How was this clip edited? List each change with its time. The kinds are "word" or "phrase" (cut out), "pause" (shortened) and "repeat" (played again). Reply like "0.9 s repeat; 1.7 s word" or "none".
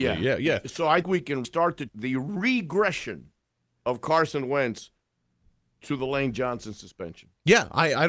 1.0 s word; 1.4 s word; 1.9 s word